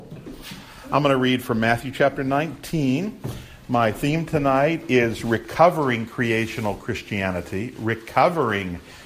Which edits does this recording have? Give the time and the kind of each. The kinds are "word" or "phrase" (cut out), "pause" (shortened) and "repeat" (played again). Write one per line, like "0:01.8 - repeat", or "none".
none